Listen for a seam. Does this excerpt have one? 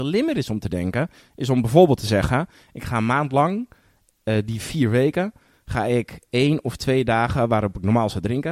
no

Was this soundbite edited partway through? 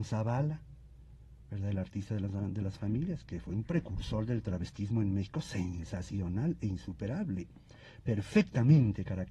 yes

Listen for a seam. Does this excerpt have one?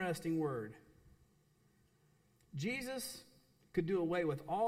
no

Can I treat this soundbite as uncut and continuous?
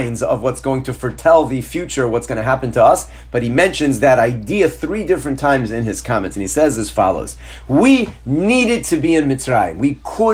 yes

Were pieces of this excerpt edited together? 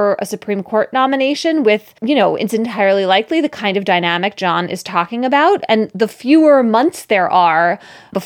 yes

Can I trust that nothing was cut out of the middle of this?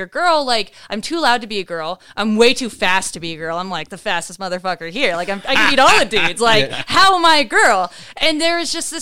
yes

